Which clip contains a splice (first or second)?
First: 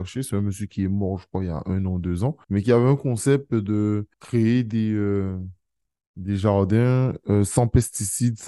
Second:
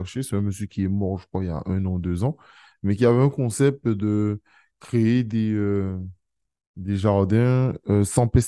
first